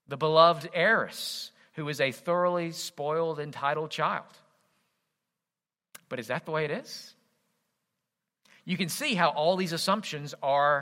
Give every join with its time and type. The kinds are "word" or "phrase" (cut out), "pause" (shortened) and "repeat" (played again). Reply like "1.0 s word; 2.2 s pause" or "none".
none